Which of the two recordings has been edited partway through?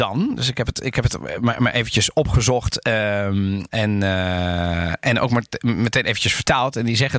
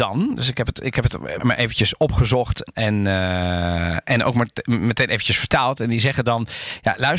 second; 2 cuts; at 1.4 s, 2.7 s

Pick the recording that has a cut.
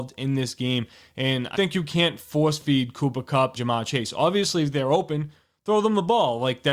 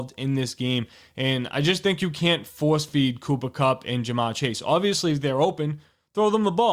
first; 2 cuts; at 1.5 s, 3.6 s

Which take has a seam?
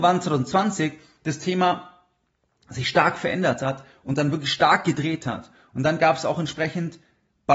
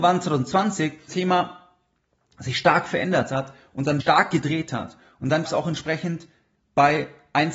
second; 3 cuts; at 1.1 s, 4.0 s, 5.5 s

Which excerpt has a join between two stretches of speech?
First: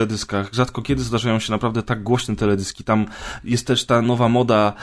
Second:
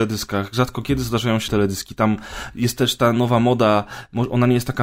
second; 1 cut; at 1.5 s

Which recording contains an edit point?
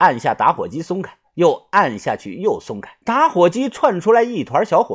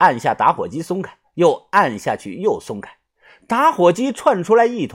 first; 1 cut; at 3.0 s

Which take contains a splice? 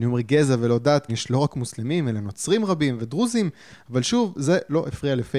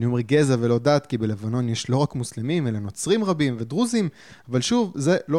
first; 1 cut; at 1.1 s

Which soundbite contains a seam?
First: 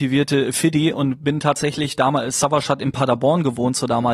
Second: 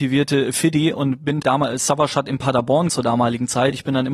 second; 2 cuts; at 1.4 s, 2.9 s

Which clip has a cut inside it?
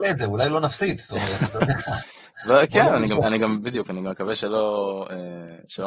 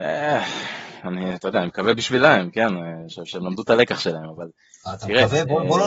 first; 1 cut; at 3.2 s

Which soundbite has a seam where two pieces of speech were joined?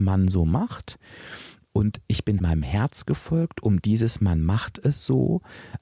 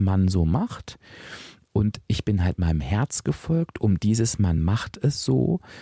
first; 1 cut; at 2.4 s

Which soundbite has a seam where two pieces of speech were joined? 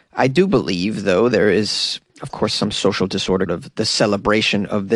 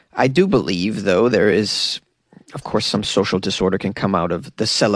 first; 2 cuts; at 2.1 s, 3.5 s

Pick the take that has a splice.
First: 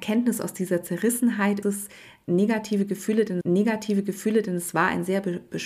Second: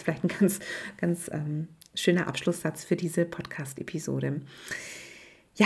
first; 2 cuts; at 1.6 s, 3.4 s

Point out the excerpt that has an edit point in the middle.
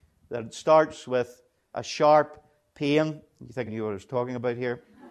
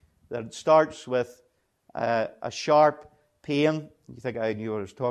first; 2 cuts; at 1.7 s, 3.7 s

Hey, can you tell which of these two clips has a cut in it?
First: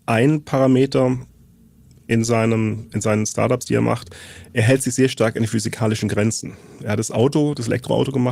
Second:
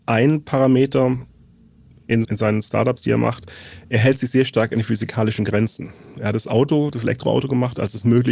second; 1 cut; at 2.2 s

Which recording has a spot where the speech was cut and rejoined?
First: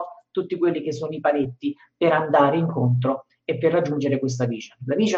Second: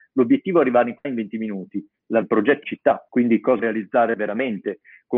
second; 5 cuts; at 1.0 s, 2.2 s, 2.6 s, 3.1 s, 3.6 s

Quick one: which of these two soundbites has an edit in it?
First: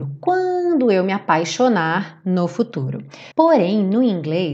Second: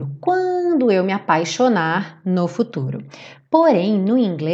first; 1 cut; at 3.3 s

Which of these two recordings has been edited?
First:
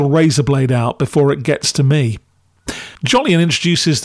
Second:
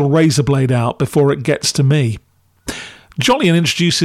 first; 1 cut; at 3.0 s

